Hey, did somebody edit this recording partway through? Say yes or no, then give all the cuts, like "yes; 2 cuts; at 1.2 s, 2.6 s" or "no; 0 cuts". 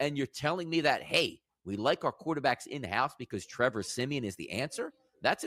no; 0 cuts